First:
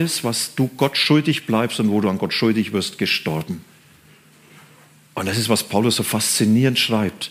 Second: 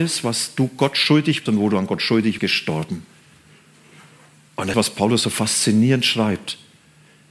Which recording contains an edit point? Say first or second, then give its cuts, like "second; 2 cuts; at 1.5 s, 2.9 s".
second; 3 cuts; at 1.5 s, 2.4 s, 4.7 s